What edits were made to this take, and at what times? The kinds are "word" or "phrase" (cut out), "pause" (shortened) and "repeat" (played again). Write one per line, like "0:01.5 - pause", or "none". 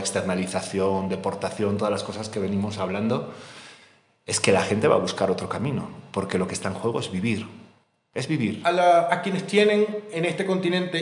none